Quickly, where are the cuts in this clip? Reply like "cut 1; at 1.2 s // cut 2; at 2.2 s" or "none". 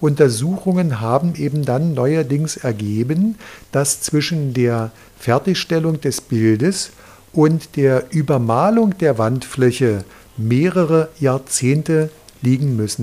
none